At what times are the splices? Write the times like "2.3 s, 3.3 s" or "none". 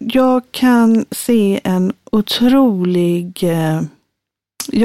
none